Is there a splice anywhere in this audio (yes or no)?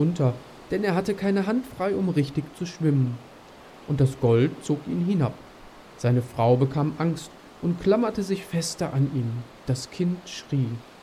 yes